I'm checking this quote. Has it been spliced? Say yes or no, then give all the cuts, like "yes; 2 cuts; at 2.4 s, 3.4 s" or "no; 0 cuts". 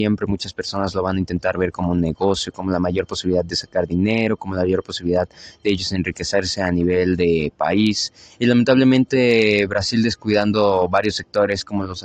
no; 0 cuts